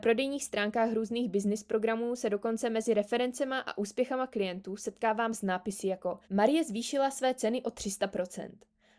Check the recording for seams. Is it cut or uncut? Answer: cut